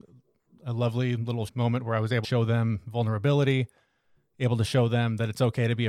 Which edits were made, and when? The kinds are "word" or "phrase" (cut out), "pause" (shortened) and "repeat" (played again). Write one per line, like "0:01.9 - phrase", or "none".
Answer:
0:01.5 - word
0:02.2 - word